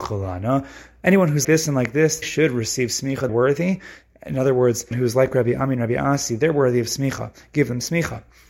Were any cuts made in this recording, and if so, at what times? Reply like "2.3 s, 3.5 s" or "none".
1.4 s, 2.2 s, 3.3 s, 4.9 s